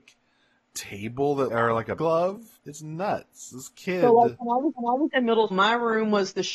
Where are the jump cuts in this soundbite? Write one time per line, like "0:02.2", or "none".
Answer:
0:01.5
0:02.0
0:02.6
0:04.7
0:05.5